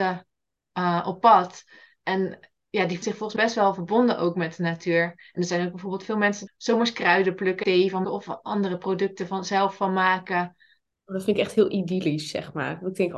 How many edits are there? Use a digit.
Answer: 5